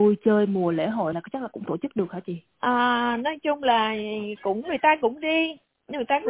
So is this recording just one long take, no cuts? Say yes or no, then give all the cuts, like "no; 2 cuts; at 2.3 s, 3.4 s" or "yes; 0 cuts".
no; 3 cuts; at 1.1 s, 1.7 s, 2.5 s